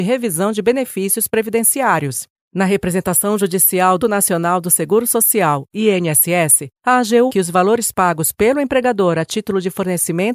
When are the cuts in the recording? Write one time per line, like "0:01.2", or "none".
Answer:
0:04.0
0:06.8
0:07.3